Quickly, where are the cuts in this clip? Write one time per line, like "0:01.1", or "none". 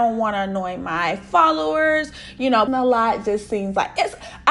0:02.7